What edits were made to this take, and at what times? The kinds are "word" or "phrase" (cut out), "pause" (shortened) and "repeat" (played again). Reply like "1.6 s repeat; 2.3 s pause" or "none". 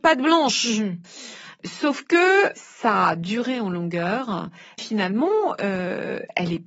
2.5 s word; 4.8 s word